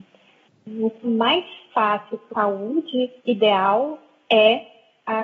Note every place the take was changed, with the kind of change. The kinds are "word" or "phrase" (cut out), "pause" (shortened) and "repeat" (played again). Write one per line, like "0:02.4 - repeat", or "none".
0:01.0 - word
0:02.3 - word
0:03.2 - pause